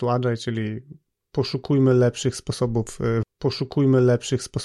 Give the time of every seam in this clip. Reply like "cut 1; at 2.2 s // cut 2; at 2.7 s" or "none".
cut 1; at 3.2 s